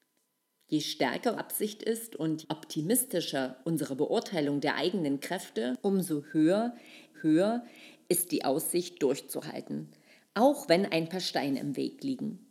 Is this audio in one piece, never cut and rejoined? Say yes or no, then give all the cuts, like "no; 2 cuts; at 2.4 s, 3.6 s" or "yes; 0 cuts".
no; 4 cuts; at 1.4 s, 2.4 s, 3.6 s, 7.1 s